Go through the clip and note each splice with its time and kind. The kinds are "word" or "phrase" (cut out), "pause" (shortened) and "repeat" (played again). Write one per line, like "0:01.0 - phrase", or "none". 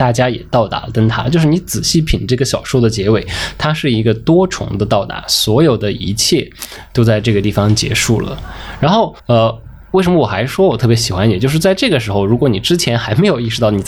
0:09.2 - pause